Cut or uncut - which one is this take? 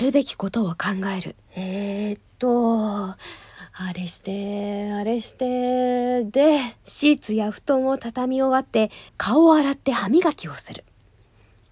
cut